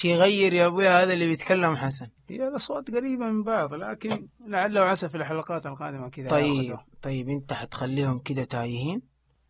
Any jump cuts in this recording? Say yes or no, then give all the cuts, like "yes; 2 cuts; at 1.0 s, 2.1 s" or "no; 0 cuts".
yes; 1 cut; at 2.2 s